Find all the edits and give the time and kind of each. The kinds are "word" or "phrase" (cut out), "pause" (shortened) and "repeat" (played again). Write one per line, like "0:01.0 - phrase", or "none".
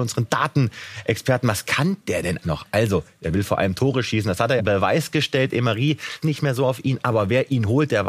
0:02.4 - word
0:04.6 - phrase
0:06.2 - word